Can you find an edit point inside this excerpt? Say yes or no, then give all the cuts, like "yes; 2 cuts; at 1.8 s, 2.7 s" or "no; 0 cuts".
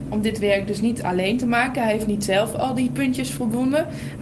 no; 0 cuts